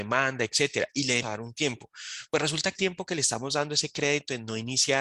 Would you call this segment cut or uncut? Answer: cut